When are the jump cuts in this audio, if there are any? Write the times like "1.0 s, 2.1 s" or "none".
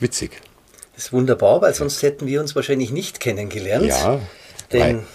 none

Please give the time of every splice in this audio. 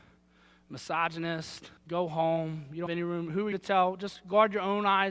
1.8 s, 2.9 s, 3.5 s

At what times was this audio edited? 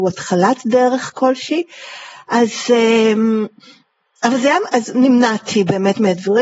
1.1 s, 4.7 s

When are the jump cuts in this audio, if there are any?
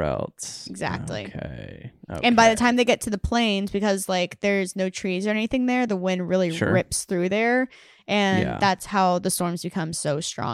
none

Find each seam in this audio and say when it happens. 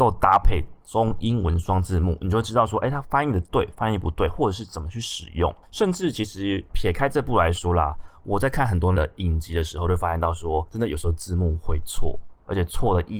6.7 s, 8.9 s

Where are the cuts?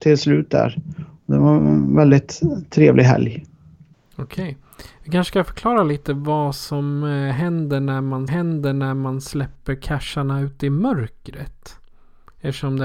8.3 s

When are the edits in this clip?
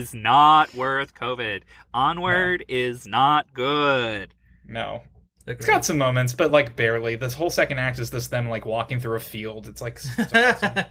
none

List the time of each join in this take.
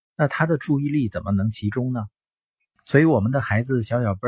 none

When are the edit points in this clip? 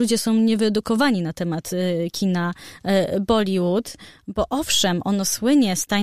none

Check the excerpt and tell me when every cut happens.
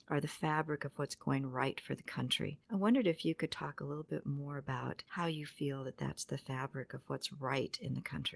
none

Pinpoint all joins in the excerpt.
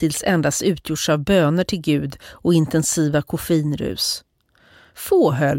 none

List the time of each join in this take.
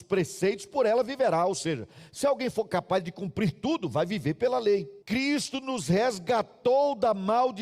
5.0 s

